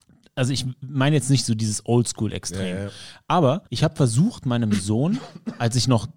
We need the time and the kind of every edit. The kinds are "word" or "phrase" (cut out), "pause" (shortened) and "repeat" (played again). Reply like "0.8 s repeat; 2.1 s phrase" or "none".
3.7 s pause